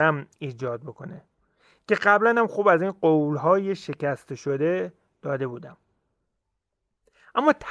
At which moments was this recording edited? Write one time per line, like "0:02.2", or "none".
none